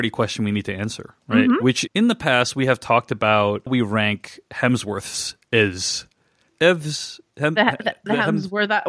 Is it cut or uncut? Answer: cut